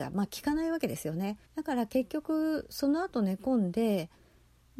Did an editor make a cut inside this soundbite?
yes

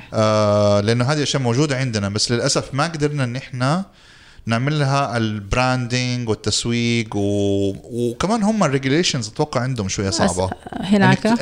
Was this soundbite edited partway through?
no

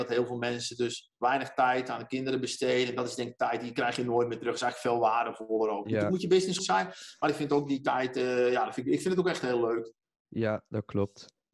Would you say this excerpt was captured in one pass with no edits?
no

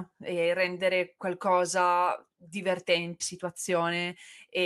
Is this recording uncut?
no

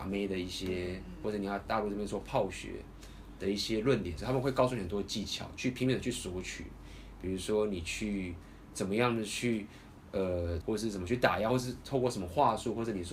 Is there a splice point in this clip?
yes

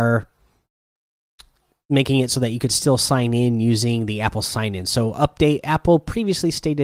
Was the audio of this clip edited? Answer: no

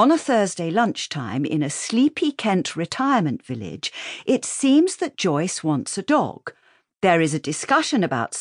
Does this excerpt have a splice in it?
no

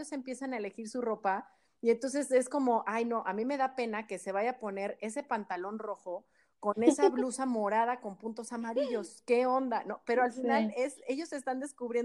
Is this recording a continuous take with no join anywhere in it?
yes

